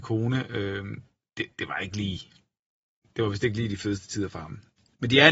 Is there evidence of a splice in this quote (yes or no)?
no